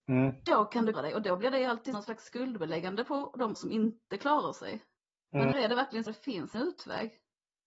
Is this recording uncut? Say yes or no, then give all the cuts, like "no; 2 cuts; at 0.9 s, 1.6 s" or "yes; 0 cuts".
no; 6 cuts; at 0.9 s, 1.9 s, 3.5 s, 5.5 s, 6.1 s, 6.5 s